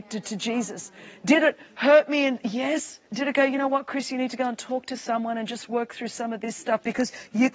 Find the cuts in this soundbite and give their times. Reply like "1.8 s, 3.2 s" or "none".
3.1 s